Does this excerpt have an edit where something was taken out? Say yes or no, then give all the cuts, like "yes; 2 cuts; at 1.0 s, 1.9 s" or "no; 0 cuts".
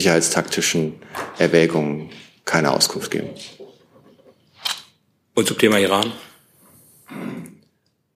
no; 0 cuts